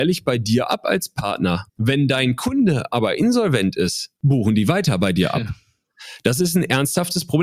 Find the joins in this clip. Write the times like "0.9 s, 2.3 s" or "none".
1.7 s, 4.2 s